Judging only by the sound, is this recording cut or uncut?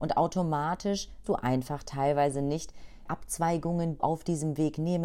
cut